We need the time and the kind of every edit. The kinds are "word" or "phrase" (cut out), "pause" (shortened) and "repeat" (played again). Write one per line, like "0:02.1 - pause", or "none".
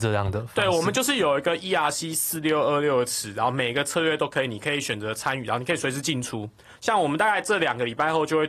none